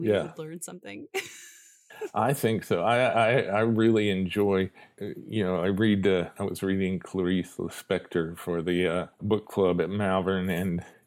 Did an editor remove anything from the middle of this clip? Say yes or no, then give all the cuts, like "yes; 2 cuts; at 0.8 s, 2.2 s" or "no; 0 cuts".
no; 0 cuts